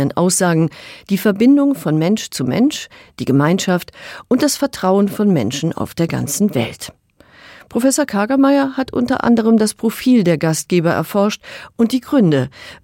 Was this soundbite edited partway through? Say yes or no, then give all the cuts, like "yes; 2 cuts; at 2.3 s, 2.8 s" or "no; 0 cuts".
no; 0 cuts